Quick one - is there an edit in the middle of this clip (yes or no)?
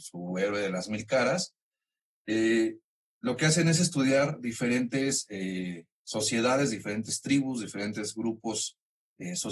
no